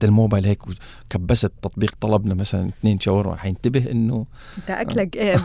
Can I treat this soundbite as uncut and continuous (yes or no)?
no